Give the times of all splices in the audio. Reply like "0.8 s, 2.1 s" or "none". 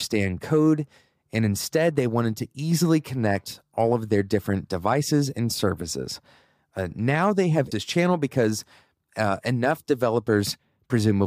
7.7 s